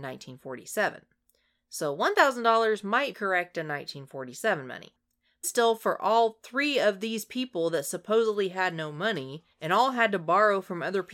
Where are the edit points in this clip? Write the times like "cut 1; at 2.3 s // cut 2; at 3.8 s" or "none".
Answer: cut 1; at 3.1 s // cut 2; at 5.4 s // cut 3; at 9.5 s